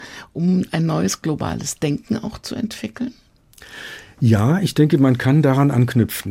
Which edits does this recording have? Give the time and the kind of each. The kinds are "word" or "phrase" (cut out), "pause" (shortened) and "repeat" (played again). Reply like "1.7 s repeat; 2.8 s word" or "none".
none